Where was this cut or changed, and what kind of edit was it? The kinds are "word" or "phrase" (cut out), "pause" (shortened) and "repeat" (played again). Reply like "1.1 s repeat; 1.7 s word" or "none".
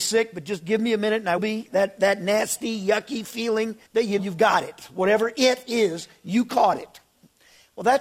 1.4 s word; 3.9 s pause; 4.2 s word